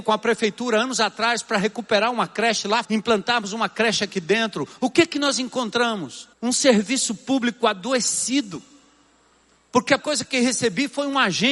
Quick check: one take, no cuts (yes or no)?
no